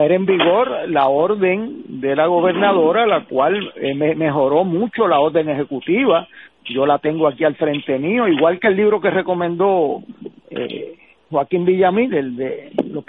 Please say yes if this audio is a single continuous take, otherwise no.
yes